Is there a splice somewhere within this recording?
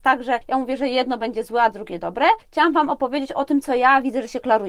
no; 0 cuts

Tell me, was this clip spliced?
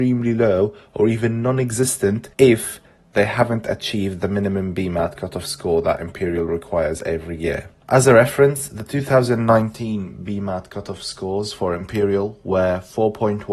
yes; 1 cut; at 2.3 s

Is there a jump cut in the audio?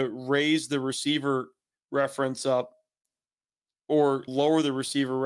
no; 0 cuts

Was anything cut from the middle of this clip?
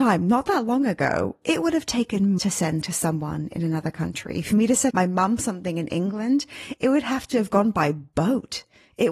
yes; 3 cuts; at 2.4 s, 2.8 s, 4.9 s

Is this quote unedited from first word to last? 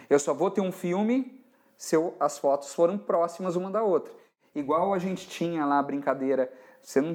yes; 0 cuts

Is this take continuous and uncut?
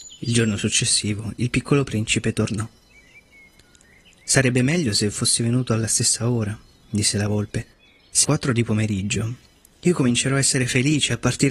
no; 1 cut; at 8.2 s

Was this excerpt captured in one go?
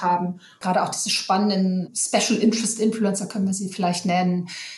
yes; 0 cuts

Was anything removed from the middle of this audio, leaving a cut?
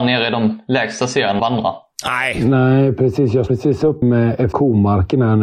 yes; 4 cuts; at 1.4 s, 3.5 s, 4.0 s, 4.5 s

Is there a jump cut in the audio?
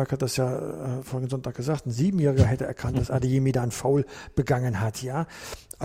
no; 0 cuts

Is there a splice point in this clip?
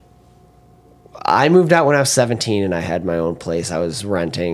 no; 0 cuts

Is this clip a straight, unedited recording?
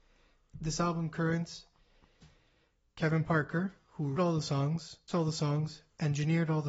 no; 2 cuts; at 4.2 s, 5.1 s

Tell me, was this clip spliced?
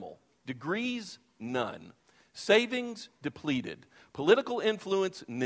no; 0 cuts

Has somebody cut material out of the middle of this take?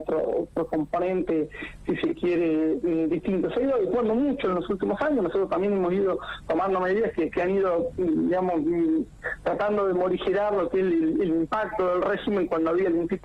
no; 0 cuts

